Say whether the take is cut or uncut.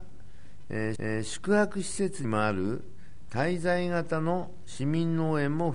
cut